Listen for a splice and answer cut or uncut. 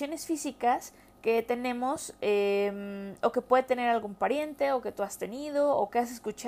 uncut